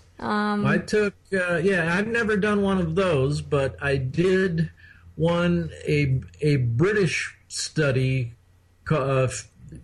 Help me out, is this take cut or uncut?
uncut